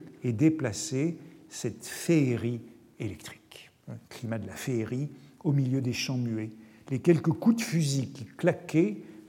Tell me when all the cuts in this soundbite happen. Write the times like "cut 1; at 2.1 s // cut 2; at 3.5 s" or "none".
cut 1; at 4.0 s